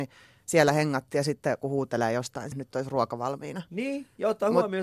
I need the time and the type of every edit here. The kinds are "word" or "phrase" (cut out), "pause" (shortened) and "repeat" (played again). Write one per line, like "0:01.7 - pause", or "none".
0:01.6 - word
0:02.5 - word